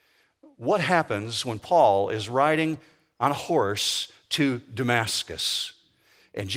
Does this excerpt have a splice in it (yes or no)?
no